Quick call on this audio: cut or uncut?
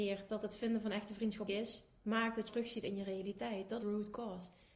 cut